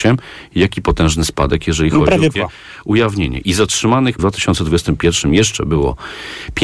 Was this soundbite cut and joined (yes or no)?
yes